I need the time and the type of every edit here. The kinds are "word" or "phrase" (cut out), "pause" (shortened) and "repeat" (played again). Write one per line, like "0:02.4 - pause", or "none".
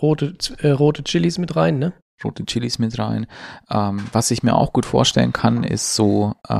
none